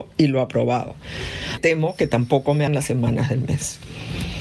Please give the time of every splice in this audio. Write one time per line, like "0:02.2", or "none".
0:01.6
0:02.7